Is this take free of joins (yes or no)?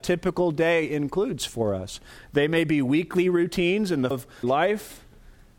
no